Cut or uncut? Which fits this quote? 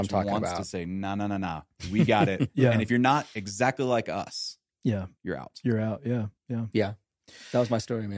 cut